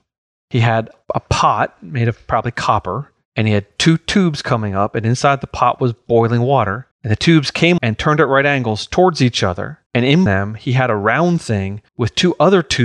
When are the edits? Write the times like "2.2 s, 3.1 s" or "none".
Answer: 6.9 s, 7.8 s, 9.9 s, 10.3 s, 11.9 s